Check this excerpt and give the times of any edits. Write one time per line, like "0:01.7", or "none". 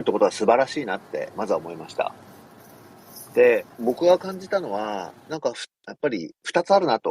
0:03.7
0:05.7